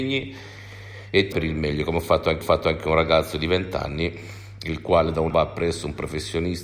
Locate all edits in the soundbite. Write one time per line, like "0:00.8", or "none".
0:01.3
0:02.4
0:05.3